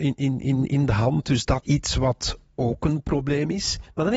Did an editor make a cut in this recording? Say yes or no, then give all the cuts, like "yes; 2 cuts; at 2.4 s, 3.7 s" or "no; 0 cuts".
yes; 1 cut; at 1.6 s